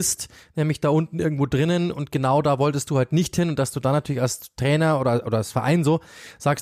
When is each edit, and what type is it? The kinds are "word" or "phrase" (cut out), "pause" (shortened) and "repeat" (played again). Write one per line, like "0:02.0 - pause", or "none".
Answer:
none